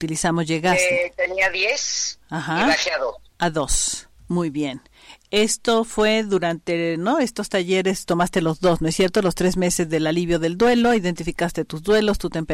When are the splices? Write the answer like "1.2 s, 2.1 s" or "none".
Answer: 3.3 s, 4.2 s